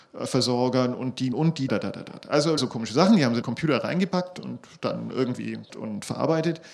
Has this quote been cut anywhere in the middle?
yes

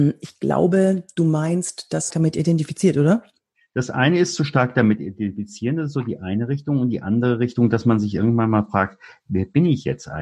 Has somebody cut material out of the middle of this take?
yes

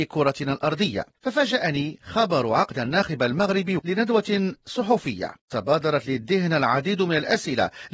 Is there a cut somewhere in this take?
yes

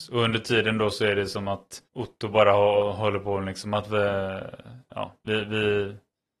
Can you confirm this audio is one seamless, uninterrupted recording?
no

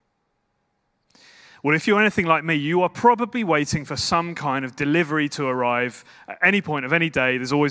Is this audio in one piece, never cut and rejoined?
yes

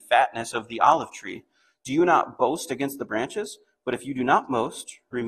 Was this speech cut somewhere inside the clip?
no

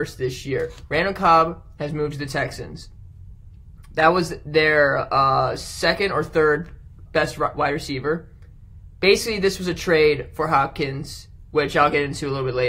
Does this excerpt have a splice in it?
yes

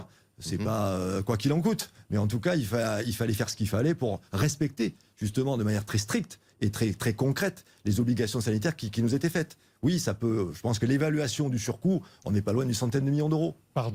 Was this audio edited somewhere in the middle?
no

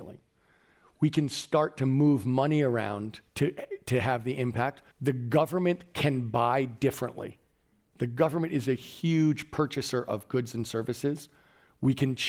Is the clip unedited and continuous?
no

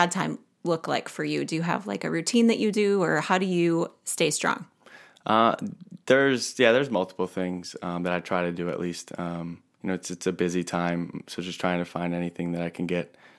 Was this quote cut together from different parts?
no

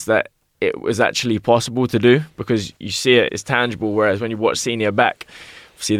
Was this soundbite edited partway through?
yes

